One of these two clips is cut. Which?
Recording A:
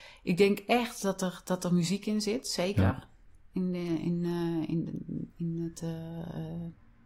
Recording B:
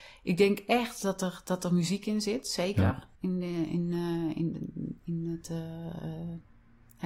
B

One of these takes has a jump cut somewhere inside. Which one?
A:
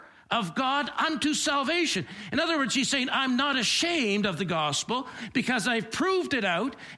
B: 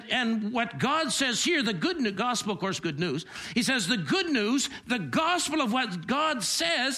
B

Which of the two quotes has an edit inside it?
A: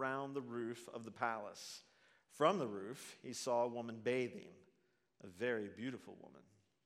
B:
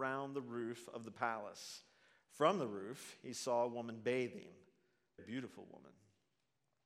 B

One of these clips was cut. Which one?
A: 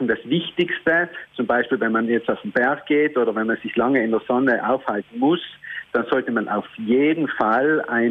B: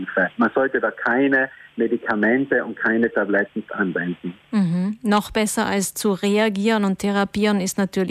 B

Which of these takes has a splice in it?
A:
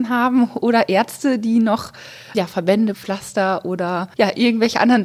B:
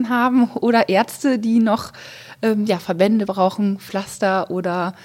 A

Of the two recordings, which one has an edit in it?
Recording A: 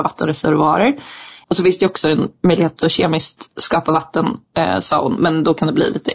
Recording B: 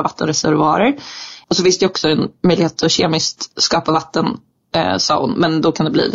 A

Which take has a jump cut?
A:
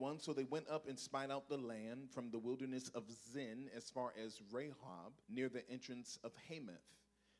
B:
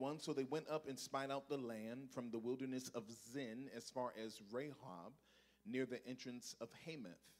A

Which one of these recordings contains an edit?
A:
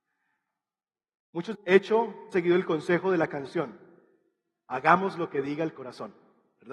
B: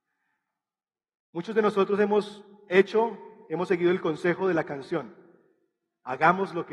A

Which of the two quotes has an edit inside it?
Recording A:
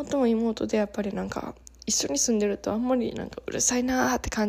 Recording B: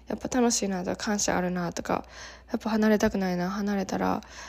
A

